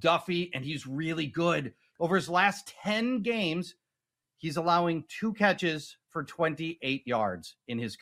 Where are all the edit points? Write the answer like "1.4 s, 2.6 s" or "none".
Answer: none